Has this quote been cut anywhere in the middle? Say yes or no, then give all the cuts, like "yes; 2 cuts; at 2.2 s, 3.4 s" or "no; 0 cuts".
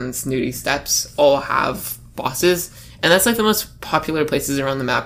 no; 0 cuts